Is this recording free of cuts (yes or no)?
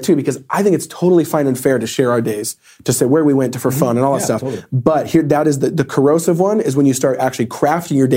yes